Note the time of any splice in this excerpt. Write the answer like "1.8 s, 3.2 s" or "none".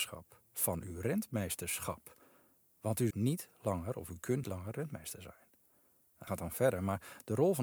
3.1 s, 4.4 s, 6.3 s